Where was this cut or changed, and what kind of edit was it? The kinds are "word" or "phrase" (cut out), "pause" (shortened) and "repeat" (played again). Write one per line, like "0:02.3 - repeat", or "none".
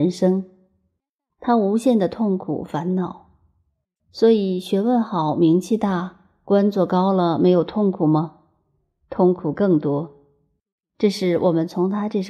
none